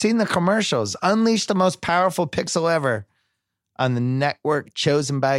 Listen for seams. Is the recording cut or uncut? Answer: uncut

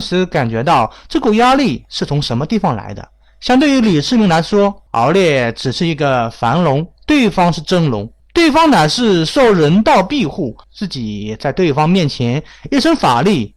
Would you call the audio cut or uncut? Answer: cut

